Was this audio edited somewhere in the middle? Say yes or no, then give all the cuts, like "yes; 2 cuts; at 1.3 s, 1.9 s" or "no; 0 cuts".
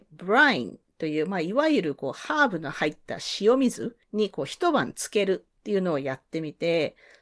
yes; 2 cuts; at 4.0 s, 5.6 s